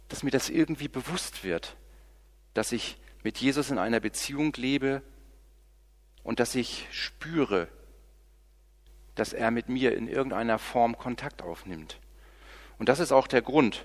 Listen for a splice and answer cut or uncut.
uncut